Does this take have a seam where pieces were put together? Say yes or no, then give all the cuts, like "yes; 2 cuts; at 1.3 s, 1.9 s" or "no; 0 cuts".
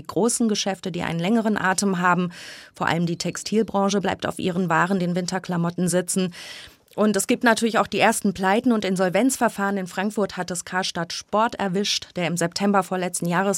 no; 0 cuts